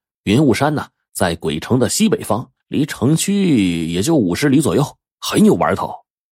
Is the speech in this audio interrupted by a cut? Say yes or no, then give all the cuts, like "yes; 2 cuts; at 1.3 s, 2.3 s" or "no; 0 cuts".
yes; 1 cut; at 2.6 s